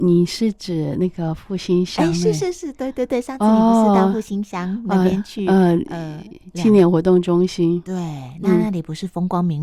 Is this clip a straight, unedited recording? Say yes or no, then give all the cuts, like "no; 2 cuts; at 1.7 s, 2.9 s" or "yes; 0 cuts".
yes; 0 cuts